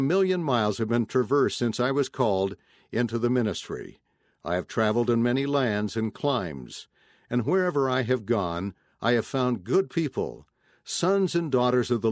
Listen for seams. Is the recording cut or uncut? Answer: uncut